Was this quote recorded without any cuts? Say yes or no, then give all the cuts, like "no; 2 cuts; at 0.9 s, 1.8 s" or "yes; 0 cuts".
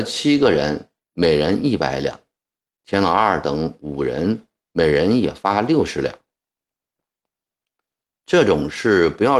yes; 0 cuts